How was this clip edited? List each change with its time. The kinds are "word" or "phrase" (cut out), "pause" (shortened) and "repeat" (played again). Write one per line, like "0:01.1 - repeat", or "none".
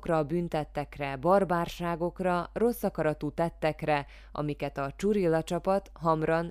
none